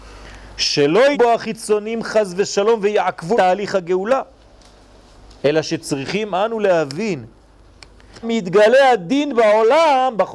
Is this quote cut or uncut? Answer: cut